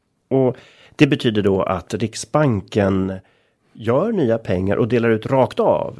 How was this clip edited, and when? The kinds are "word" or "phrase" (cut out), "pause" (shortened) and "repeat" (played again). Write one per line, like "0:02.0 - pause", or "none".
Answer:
none